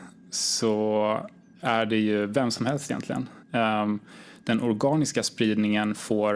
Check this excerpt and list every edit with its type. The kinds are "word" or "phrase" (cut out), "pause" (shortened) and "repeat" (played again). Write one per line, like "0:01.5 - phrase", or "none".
0:03.4 - pause

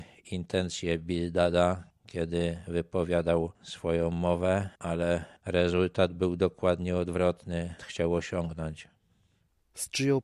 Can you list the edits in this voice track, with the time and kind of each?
0:04.8 - pause
0:07.8 - phrase

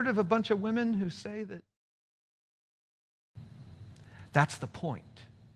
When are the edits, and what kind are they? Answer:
none

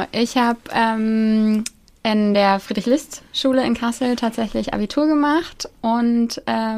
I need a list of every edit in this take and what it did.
none

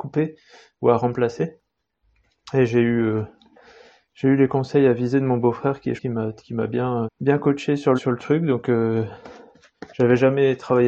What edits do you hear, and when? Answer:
0:06.0 - word
0:07.1 - word
0:08.0 - word

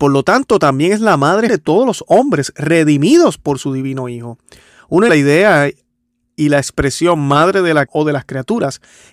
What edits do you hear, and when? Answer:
0:01.5 - word
0:05.1 - word
0:07.9 - word

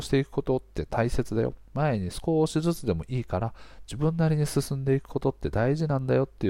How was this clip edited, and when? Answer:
0:01.6 - pause

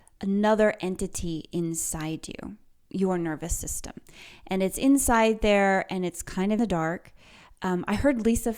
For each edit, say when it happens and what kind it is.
0:06.6 - word

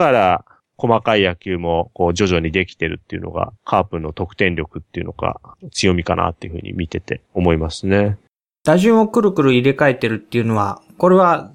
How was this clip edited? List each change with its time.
0:03.6 - pause
0:07.2 - pause

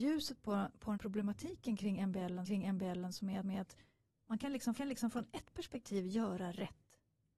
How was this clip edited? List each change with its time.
0:00.9 - word
0:02.4 - repeat
0:03.4 - repeat
0:04.7 - repeat

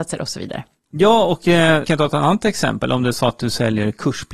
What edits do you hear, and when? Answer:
0:01.8 - word

